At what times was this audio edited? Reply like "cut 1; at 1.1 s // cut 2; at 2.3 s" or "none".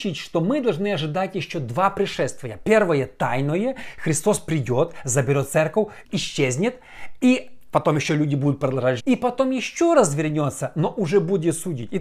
cut 1; at 6.0 s // cut 2; at 9.0 s